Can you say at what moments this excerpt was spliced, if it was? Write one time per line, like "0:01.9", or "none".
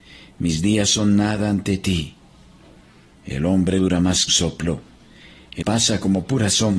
0:03.8
0:04.3
0:05.6